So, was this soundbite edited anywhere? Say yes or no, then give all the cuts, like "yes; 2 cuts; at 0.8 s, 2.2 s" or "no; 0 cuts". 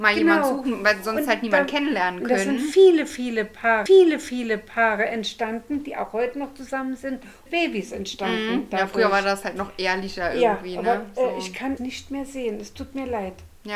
yes; 3 cuts; at 3.9 s, 7.5 s, 11.8 s